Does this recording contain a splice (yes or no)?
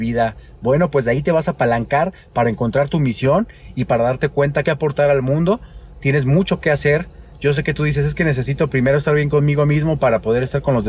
yes